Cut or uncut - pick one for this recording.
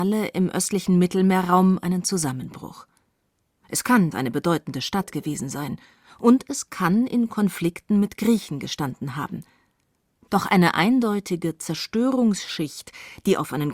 cut